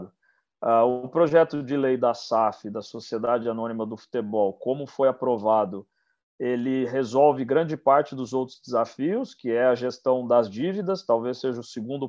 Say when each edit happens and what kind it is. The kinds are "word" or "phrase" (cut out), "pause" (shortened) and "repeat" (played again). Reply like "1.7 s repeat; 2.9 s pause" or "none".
none